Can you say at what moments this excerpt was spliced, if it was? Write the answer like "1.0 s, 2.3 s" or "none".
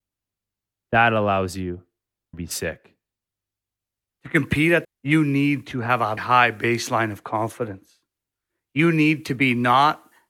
2.3 s, 4.8 s, 6.2 s